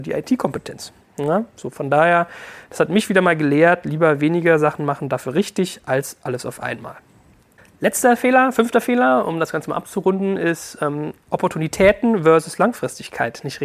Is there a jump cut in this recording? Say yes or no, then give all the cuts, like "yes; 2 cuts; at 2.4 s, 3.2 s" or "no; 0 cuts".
no; 0 cuts